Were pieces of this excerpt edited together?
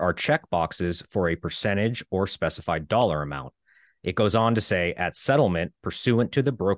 no; 0 cuts

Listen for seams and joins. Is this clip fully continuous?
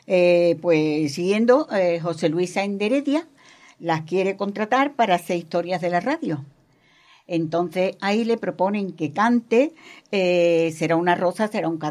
yes; 0 cuts

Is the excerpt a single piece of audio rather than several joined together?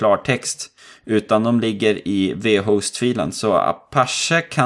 yes; 0 cuts

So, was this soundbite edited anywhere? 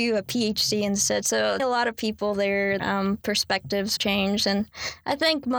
yes; 3 cuts; at 1.6 s, 2.8 s, 4.0 s

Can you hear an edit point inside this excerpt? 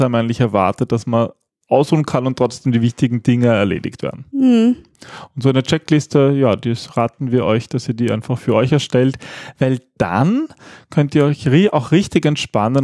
no; 0 cuts

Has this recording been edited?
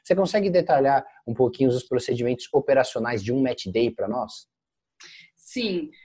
no; 0 cuts

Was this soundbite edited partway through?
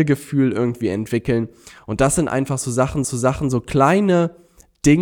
yes; 1 cut; at 3.0 s

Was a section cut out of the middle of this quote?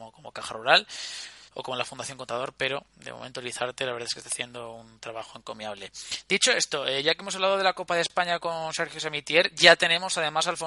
yes; 2 cuts; at 1.5 s, 2.9 s

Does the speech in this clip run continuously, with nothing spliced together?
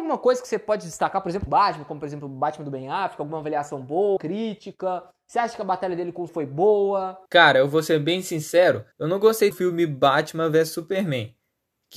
no; 6 cuts; at 1.5 s, 4.2 s, 6.3 s, 7.3 s, 8.9 s, 9.5 s

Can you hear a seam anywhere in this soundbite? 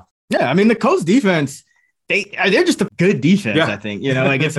yes; 2 cuts; at 2.0 s, 2.9 s

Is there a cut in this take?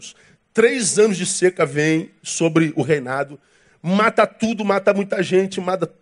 no; 0 cuts

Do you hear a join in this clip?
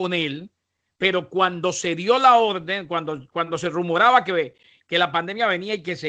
no; 0 cuts

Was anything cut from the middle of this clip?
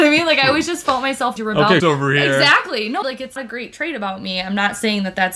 yes; 4 cuts; at 1.4 s, 1.8 s, 3.0 s, 3.4 s

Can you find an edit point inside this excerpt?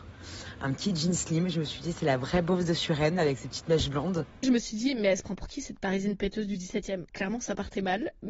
yes; 2 cuts; at 4.4 s, 7.1 s

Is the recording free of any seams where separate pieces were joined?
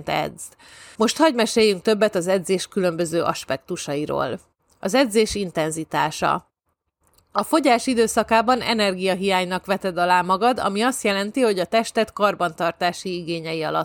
yes; 0 cuts

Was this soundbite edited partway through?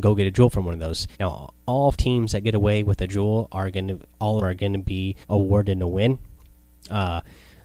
yes; 4 cuts; at 1.1 s, 1.9 s, 4.4 s, 5.2 s

